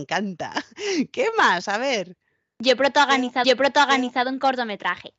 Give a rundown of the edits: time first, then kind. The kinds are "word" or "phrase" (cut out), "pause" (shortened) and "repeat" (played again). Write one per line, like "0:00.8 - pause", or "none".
0:03.4 - repeat